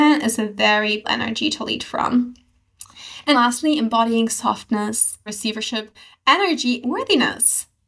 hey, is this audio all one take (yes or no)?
no